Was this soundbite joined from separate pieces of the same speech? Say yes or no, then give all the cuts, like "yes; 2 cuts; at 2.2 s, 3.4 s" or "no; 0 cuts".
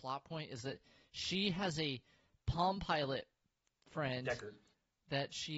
no; 0 cuts